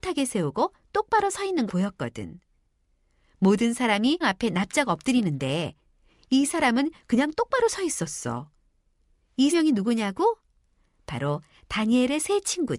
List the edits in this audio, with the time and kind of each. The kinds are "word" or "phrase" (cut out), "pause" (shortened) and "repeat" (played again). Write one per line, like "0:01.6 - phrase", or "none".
0:01.7 - word
0:04.2 - word
0:06.5 - word
0:09.5 - word

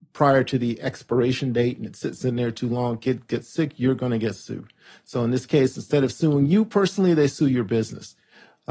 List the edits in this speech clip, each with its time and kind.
none

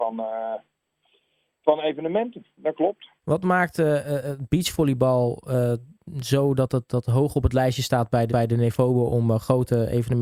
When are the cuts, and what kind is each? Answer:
0:03.2 - pause
0:08.3 - repeat

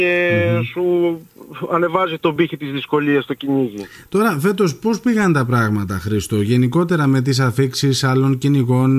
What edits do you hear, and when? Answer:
none

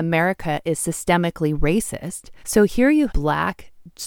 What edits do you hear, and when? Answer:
0:02.4 - pause
0:03.1 - phrase

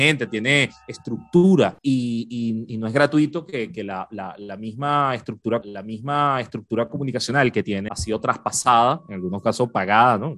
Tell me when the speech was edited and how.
0:01.8 - pause
0:05.6 - repeat
0:07.9 - phrase

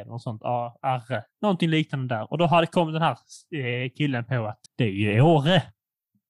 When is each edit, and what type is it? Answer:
0:01.3 - pause
0:04.7 - pause

